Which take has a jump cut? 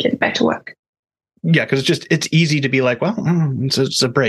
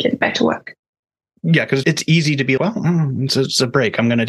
second; 2 cuts; at 1.8 s, 2.6 s

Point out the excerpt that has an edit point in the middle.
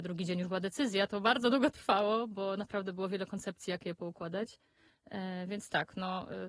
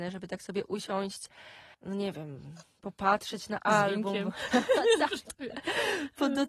second; 1 cut; at 1.7 s

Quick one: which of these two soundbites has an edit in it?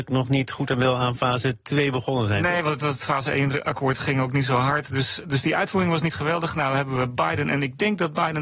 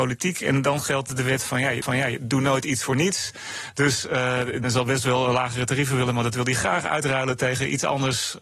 second; 2 cuts; at 1.8 s, 4.6 s

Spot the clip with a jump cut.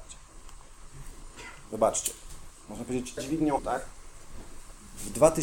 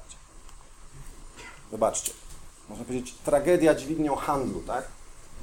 first; 2 cuts; at 3.2 s, 3.6 s

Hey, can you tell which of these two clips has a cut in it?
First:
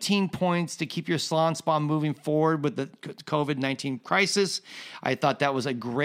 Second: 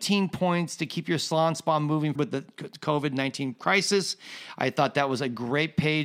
second; 1 cut; at 2.2 s

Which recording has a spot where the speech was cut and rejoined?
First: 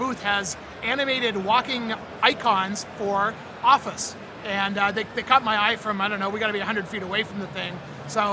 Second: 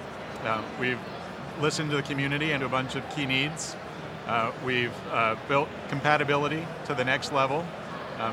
second; 1 cut; at 2.6 s

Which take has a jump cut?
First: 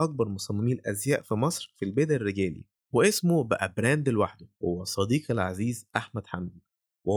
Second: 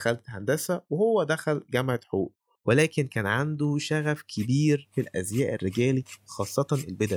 first; 1 cut; at 4.5 s

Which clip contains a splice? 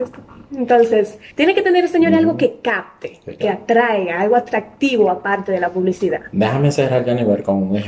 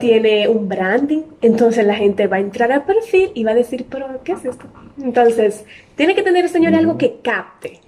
first; 1 cut; at 1.3 s

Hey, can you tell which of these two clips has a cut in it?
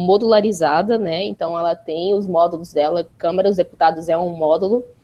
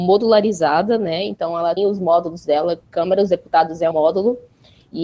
second; 2 cuts; at 1.8 s, 3.9 s

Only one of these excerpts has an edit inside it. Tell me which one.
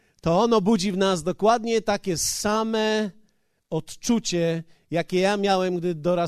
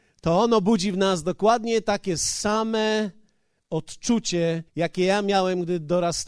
second; 1 cut; at 4.7 s

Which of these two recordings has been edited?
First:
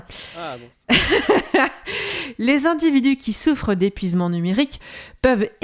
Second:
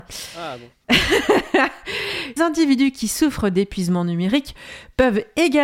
second; 1 cut; at 2.4 s

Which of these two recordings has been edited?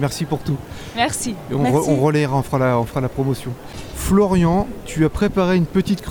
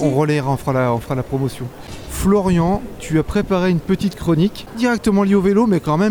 second; 1 cut; at 4.7 s

